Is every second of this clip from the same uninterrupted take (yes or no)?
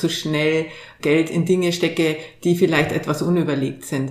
no